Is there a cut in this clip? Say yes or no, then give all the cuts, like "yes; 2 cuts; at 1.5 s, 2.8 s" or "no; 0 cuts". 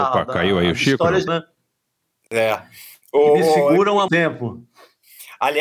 yes; 3 cuts; at 1.3 s, 3.0 s, 4.1 s